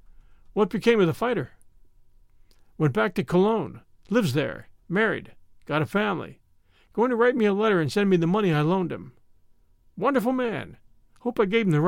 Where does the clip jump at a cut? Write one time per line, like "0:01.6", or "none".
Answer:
none